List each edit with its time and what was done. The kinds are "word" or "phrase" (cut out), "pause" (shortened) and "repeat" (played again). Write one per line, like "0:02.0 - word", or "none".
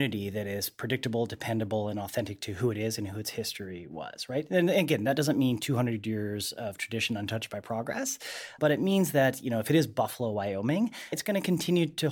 0:11.1 - word